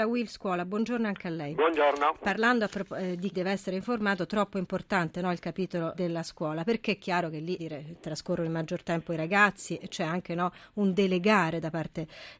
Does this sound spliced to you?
yes; 3 cuts; at 3.3 s, 5.9 s, 7.6 s

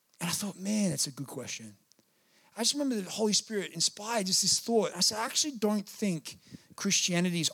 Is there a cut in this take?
no; 0 cuts

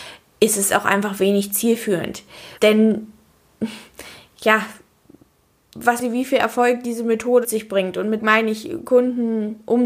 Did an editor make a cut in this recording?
yes; 4 cuts; at 2.6 s, 6.0 s, 7.4 s, 8.2 s

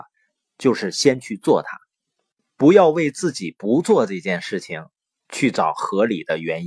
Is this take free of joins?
yes; 0 cuts

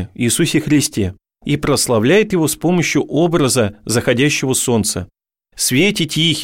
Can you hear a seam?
no; 0 cuts

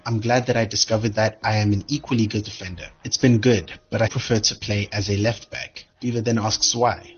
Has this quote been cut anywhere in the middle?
yes; 2 cuts; at 2.4 s, 4.1 s

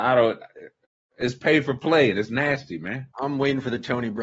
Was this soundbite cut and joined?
yes; 1 cut; at 3.1 s

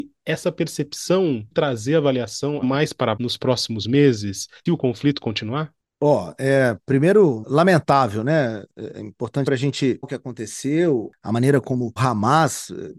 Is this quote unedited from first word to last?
no; 8 cuts; at 1.5 s, 2.6 s, 3.2 s, 4.7 s, 7.4 s, 9.5 s, 10.0 s, 12.0 s

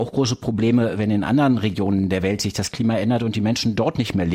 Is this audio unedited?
yes; 0 cuts

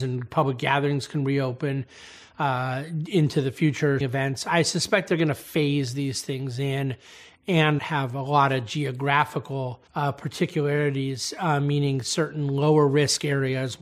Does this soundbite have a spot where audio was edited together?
yes; 3 cuts; at 4.0 s, 7.8 s, 9.9 s

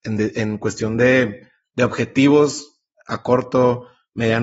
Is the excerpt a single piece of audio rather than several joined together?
yes; 0 cuts

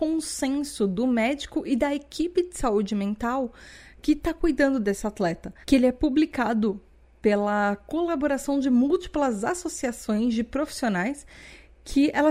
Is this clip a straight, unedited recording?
yes; 0 cuts

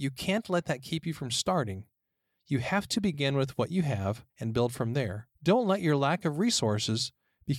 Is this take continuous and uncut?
no; 2 cuts; at 4.3 s, 5.3 s

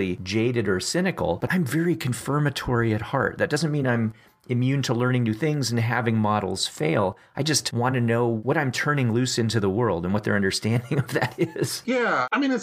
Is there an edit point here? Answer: no; 0 cuts

